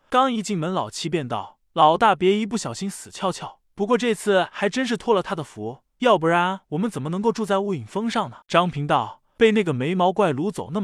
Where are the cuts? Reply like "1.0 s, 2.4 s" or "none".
8.4 s